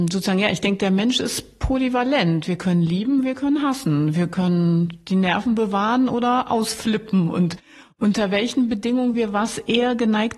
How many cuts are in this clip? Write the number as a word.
zero